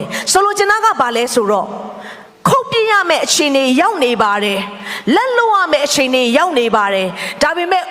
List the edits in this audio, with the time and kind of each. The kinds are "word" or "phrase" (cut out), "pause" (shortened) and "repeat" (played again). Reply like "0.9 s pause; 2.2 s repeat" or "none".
none

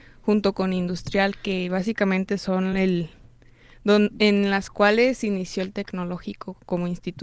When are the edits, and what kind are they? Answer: none

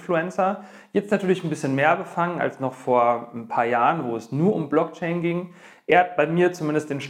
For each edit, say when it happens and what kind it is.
none

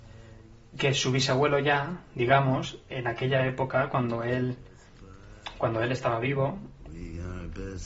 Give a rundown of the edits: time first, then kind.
2.9 s word

